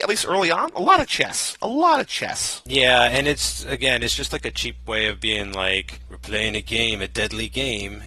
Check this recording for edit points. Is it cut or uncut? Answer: uncut